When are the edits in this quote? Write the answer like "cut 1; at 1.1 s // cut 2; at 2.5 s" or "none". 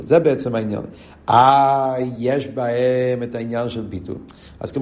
none